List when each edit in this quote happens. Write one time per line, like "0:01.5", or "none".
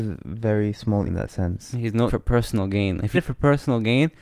0:01.1
0:02.1
0:03.1

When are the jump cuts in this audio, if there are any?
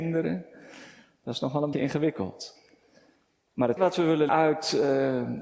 0:01.7
0:03.8
0:04.3

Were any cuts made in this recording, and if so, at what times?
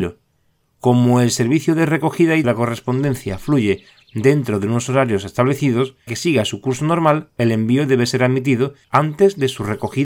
0:02.4
0:06.1
0:08.8

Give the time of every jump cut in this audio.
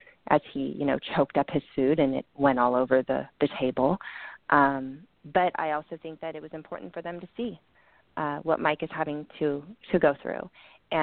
none

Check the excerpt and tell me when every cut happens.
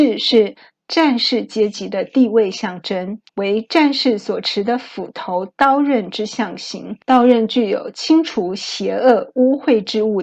0:03.3
0:07.0

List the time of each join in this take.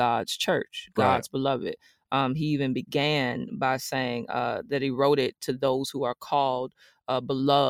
none

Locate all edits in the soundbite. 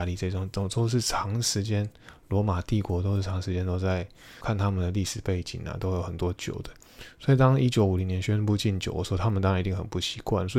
0:04.4

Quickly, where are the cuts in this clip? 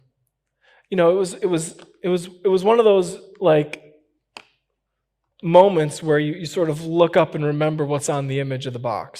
none

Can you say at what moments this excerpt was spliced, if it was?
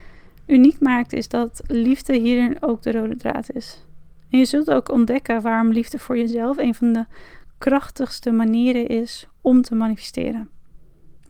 none

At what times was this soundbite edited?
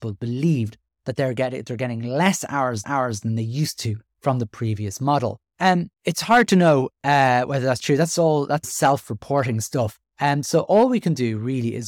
0:02.8
0:05.5
0:06.0
0:10.1

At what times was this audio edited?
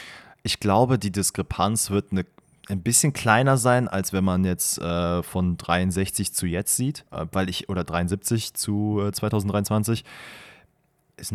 0:07.1

